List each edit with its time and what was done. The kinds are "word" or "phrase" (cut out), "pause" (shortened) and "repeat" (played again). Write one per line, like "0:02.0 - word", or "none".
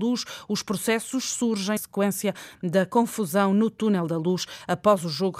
0:01.8 - word